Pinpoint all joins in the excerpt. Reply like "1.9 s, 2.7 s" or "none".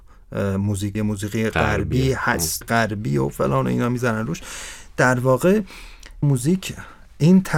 0.9 s, 2.6 s, 6.2 s